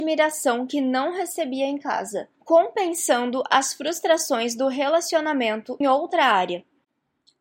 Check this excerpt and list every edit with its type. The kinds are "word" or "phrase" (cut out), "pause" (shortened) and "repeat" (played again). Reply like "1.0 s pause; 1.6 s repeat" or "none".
2.3 s pause; 5.8 s word